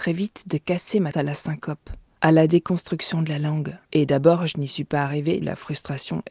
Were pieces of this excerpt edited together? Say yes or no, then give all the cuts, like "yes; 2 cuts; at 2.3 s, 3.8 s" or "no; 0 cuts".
yes; 3 cuts; at 1.1 s, 3.8 s, 5.4 s